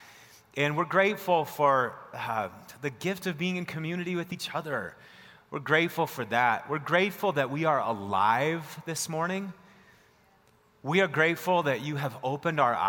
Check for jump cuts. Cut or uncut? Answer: uncut